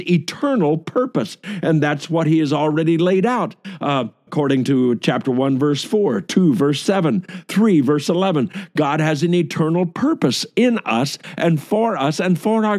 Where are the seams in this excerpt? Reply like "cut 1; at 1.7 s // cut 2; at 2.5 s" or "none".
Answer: cut 1; at 4.3 s